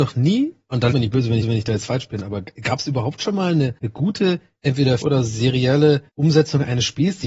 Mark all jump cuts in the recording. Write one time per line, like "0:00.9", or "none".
0:00.9
0:01.4
0:03.8
0:05.0
0:06.1